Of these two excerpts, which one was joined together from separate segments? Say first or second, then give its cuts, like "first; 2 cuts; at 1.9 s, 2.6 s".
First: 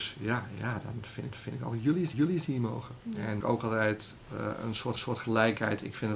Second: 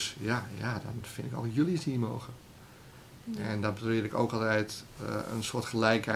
first; 5 cuts; at 1.3 s, 2.1 s, 3.0 s, 3.4 s, 5.0 s